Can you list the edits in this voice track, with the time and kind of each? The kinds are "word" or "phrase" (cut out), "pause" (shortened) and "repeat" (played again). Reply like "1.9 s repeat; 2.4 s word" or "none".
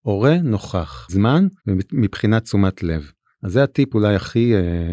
1.1 s word; 1.6 s pause; 3.3 s pause